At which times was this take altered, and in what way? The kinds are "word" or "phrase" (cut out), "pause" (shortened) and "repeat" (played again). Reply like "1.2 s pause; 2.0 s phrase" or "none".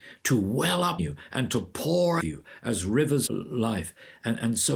1.0 s word; 2.2 s phrase; 3.3 s phrase